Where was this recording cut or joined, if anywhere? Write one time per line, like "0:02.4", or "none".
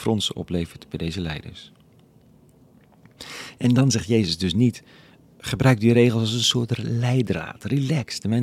none